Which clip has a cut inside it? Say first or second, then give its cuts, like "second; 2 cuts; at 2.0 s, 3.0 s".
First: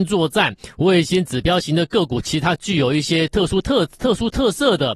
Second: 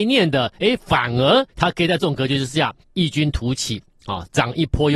second; 2 cuts; at 1.5 s, 2.8 s